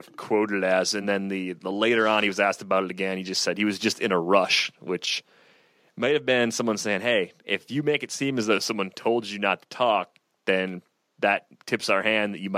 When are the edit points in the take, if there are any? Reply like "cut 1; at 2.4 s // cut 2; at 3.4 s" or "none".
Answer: none